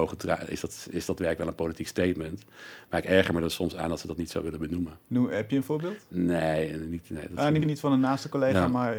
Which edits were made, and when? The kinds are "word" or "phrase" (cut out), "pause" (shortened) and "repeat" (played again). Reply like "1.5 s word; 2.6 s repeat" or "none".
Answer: 7.6 s word